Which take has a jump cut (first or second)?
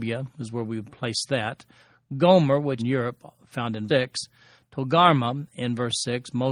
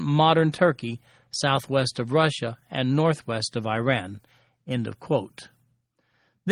first